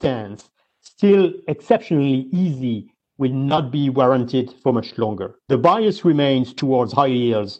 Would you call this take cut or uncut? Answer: cut